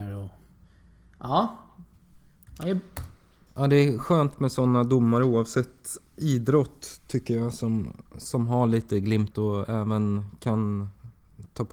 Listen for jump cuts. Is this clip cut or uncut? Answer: cut